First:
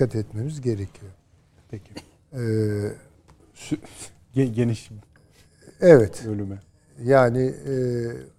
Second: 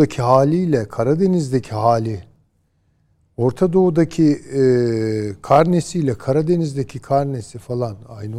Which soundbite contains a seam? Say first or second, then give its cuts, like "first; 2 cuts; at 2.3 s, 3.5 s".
first; 1 cut; at 3.1 s